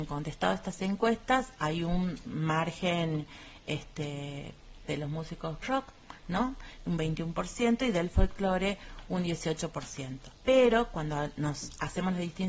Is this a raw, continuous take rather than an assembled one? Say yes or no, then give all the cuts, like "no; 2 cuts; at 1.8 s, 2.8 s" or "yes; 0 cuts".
no; 4 cuts; at 2.2 s, 4.8 s, 5.6 s, 10.3 s